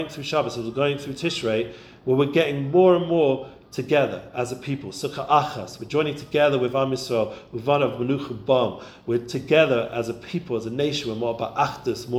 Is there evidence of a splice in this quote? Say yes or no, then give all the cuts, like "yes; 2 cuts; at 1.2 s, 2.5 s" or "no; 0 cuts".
no; 0 cuts